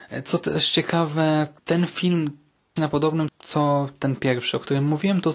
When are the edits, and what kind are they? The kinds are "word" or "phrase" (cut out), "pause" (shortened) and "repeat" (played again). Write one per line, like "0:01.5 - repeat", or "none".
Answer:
0:01.6 - pause
0:02.8 - phrase
0:03.3 - word